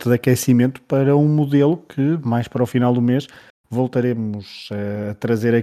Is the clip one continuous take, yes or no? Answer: yes